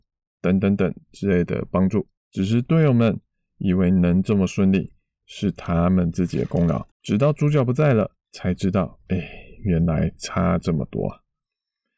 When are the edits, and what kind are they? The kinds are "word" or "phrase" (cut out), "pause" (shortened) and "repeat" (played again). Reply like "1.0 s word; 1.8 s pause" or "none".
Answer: 2.2 s pause; 6.9 s pause; 8.2 s pause